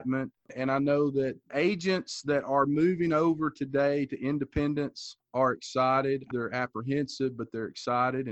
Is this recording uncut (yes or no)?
no